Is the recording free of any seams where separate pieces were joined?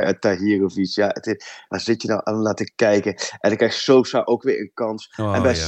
yes; 0 cuts

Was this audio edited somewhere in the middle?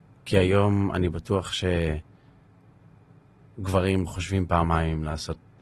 no; 0 cuts

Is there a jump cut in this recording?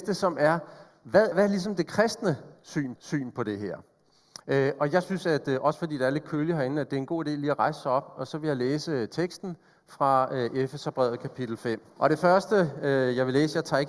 yes; 4 cuts; at 1.3 s, 3.0 s, 4.4 s, 11.9 s

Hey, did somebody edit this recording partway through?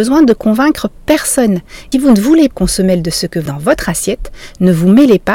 yes; 3 cuts; at 1.9 s, 2.5 s, 3.5 s

